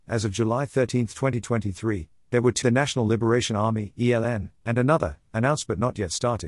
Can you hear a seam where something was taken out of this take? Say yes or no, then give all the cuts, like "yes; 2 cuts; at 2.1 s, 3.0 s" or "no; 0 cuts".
yes; 1 cut; at 2.6 s